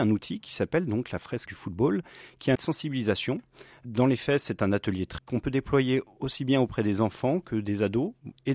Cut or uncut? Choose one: cut